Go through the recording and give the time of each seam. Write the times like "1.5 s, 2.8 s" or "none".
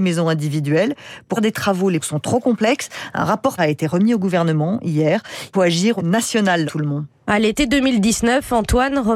1.4 s, 2.0 s, 3.6 s, 5.5 s, 6.0 s, 6.7 s